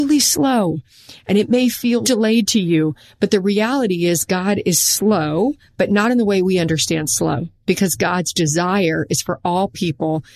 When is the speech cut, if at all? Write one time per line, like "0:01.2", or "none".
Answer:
0:02.0

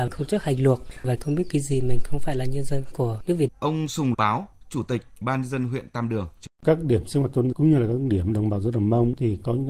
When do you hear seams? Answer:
0:01.2
0:03.5
0:04.1
0:05.2
0:06.5
0:07.5

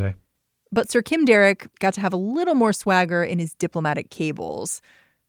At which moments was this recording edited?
0:01.7

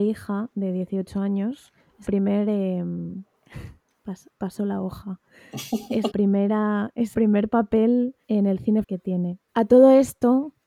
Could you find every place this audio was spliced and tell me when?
0:02.1
0:06.1
0:07.1
0:08.2
0:08.8
0:09.5

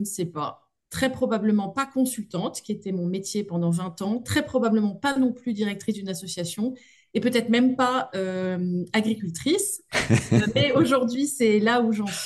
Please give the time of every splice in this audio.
none

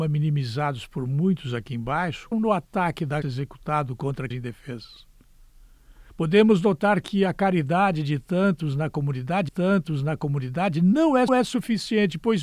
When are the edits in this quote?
0:02.3
0:03.2
0:04.3
0:06.1
0:09.5
0:11.3

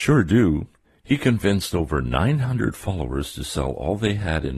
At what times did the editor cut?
none

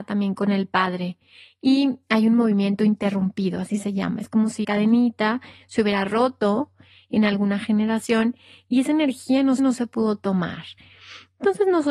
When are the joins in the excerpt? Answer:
0:04.6
0:09.6

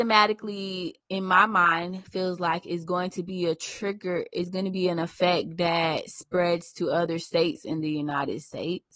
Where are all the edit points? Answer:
0:01.0

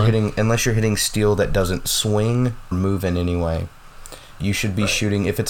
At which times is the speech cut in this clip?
0:02.7
0:04.4

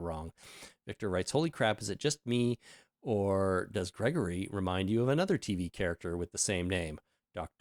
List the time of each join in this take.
none

